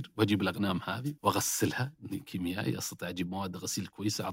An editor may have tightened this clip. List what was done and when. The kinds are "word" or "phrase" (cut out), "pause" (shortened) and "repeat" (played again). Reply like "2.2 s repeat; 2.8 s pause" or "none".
1.2 s pause

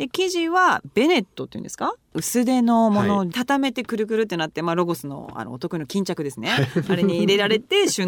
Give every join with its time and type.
3.3 s phrase

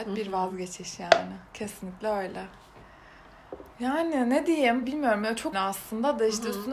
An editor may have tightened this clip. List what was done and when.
3.7 s pause; 4.8 s word; 5.5 s word

